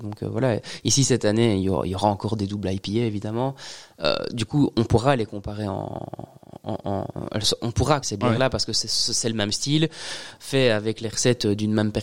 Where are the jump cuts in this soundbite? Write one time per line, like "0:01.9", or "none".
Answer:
0:08.0